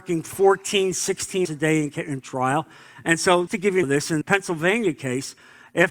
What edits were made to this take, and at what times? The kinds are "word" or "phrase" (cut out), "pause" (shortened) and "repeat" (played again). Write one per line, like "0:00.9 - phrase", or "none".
0:01.4 - word
0:03.5 - word
0:03.8 - word
0:04.2 - word